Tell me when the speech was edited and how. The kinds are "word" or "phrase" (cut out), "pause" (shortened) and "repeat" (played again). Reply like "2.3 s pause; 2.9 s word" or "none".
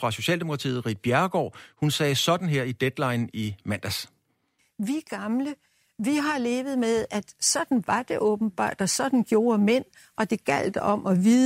none